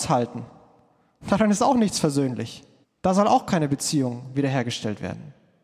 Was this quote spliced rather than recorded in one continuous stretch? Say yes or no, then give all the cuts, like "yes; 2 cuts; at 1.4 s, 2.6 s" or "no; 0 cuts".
yes; 1 cut; at 2.8 s